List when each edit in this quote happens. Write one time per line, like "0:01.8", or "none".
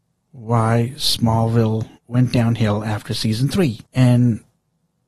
0:02.0
0:03.9